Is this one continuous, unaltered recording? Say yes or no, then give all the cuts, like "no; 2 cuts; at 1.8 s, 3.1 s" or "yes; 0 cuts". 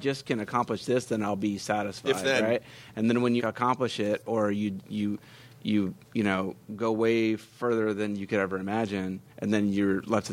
no; 3 cuts; at 3.4 s, 6.0 s, 9.3 s